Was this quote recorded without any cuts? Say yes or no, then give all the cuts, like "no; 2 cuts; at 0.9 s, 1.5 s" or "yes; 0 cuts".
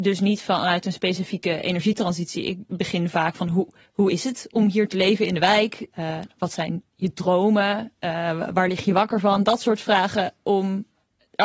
no; 1 cut; at 2.7 s